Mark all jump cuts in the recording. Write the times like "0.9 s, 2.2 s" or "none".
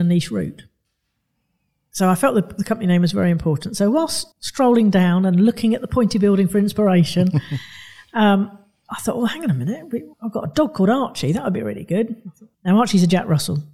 4.3 s, 10.1 s, 12.5 s